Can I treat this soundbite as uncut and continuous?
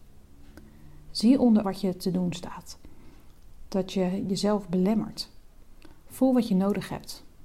no; 1 cut; at 1.6 s

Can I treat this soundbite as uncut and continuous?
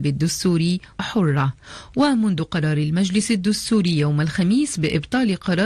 no; 1 cut; at 0.9 s

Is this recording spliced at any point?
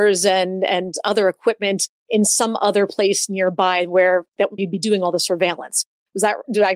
yes; 1 cut; at 4.6 s

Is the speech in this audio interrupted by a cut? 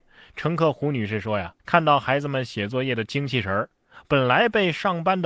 yes; 1 cut; at 1.6 s

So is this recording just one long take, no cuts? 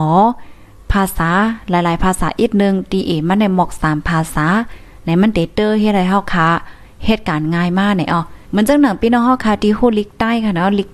no; 1 cut; at 8.4 s

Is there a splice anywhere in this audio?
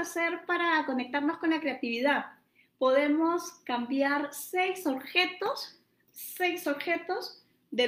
no; 0 cuts

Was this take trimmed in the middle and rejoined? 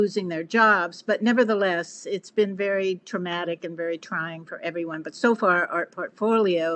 no; 0 cuts

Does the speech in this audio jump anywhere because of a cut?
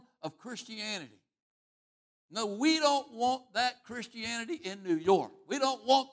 no; 0 cuts

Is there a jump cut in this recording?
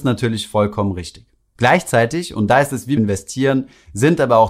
yes; 1 cut; at 3.0 s

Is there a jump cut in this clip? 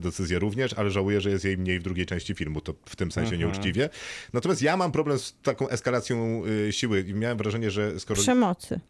no; 0 cuts

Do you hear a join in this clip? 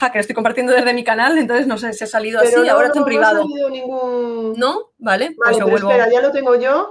yes; 1 cut; at 2.9 s

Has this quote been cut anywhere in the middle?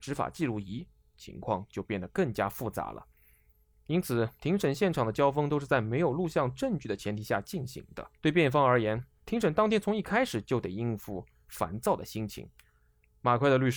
yes; 2 cuts; at 4.4 s, 8.2 s

